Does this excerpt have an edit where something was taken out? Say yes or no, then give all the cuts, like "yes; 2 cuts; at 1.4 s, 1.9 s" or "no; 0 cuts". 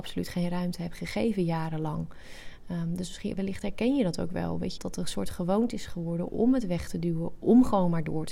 yes; 1 cut; at 4.8 s